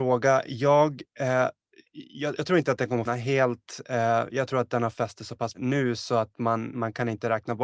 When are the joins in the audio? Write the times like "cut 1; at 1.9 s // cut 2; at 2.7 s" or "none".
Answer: cut 1; at 3.1 s // cut 2; at 4.9 s // cut 3; at 5.5 s // cut 4; at 6.7 s